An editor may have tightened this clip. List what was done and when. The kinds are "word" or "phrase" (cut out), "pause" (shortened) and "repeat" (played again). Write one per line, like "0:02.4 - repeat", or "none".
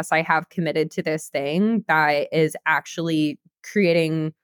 none